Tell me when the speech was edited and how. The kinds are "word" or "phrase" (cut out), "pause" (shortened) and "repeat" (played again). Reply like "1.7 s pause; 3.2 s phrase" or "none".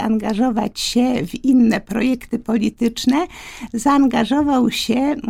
none